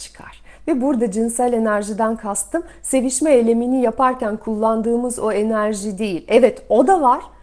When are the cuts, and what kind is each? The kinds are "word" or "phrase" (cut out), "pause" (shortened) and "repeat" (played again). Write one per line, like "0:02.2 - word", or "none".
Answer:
none